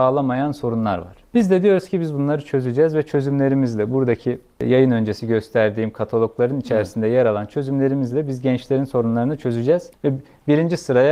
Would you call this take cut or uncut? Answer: uncut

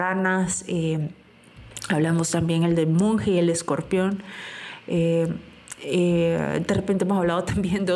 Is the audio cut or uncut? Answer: uncut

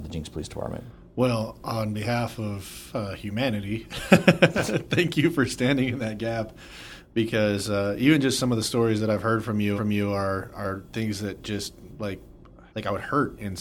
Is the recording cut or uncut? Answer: cut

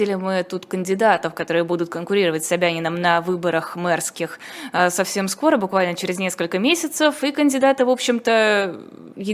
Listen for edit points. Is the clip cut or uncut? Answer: uncut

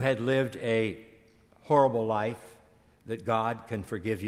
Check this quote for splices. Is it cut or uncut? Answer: uncut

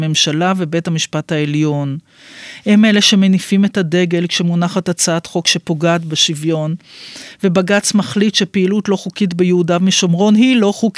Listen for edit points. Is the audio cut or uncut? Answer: uncut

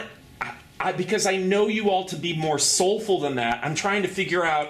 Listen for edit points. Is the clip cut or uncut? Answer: cut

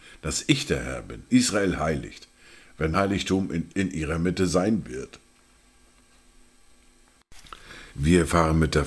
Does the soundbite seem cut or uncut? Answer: cut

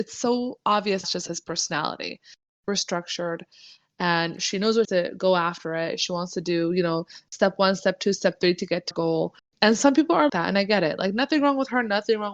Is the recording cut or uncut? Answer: cut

